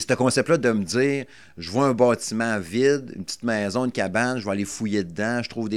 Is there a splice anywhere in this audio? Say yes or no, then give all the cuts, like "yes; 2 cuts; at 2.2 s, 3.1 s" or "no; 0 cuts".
no; 0 cuts